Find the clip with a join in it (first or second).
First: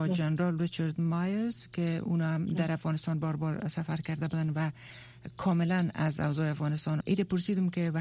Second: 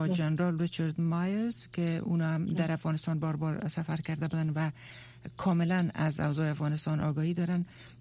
first